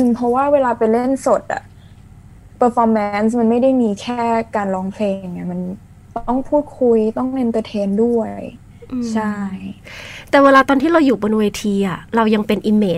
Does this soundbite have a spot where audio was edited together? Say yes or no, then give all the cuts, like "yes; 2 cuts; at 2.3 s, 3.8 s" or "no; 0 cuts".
no; 0 cuts